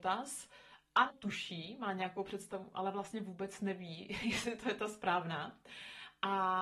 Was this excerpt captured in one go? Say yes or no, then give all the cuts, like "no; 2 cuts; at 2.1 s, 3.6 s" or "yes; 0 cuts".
no; 1 cut; at 1.1 s